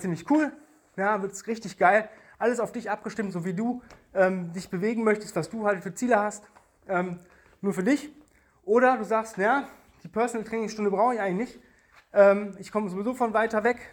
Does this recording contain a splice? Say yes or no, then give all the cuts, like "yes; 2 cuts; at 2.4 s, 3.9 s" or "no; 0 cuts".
no; 0 cuts